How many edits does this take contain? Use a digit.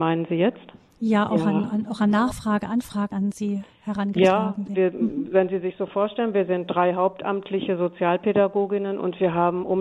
2